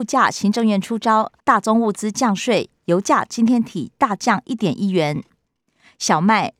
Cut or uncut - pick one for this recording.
cut